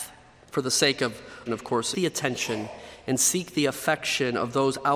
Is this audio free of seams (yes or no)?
no